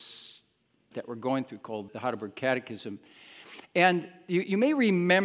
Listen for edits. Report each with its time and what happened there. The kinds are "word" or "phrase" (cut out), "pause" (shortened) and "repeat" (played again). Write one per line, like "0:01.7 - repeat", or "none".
0:00.9 - word
0:01.9 - word